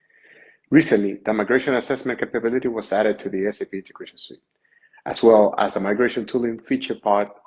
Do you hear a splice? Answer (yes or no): no